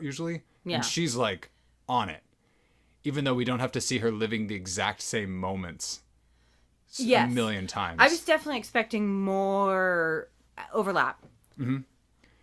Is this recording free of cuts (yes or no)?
yes